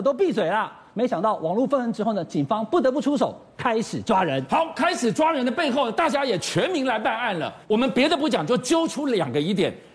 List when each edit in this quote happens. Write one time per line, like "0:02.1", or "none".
0:07.6

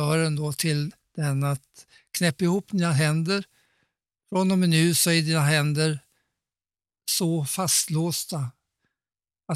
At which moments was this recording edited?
none

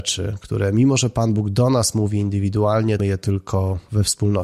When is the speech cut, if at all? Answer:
0:03.0

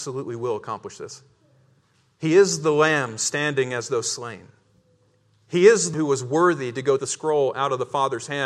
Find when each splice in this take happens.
0:05.9
0:07.0

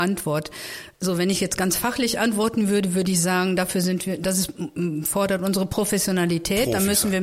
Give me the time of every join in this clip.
none

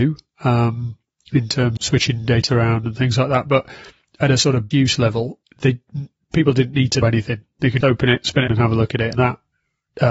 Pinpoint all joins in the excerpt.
0:01.8
0:02.5
0:04.7
0:05.4
0:07.0
0:07.8
0:08.5
0:09.1

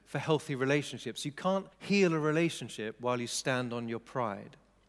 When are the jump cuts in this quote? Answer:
0:01.7

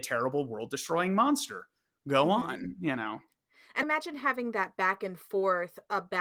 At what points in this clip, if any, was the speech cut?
0:03.8

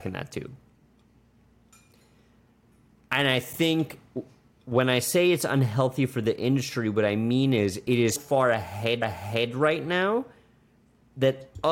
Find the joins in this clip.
0:08.2
0:09.0

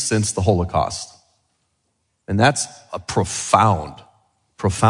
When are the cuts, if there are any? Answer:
none

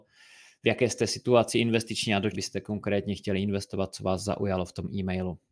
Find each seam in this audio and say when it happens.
0:02.3

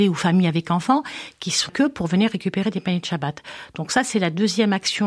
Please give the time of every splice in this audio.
0:01.7

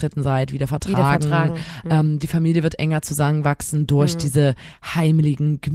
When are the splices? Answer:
none

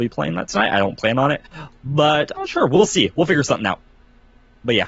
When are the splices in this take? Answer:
0:02.4

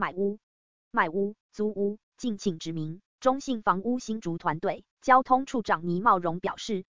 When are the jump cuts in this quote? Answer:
0:01.4
0:02.1
0:03.1
0:04.9

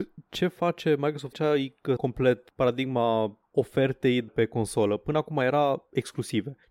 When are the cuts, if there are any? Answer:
0:01.3
0:02.0
0:02.5
0:04.3

